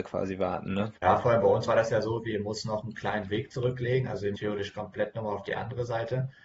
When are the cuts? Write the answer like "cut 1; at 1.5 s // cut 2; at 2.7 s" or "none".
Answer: cut 1; at 1.0 s // cut 2; at 4.4 s